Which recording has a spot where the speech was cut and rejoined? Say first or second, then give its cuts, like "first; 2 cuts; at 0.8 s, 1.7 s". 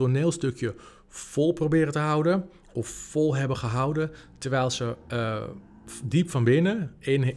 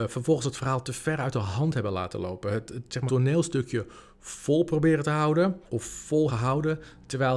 second; 3 cuts; at 3.1 s, 5.6 s, 6.3 s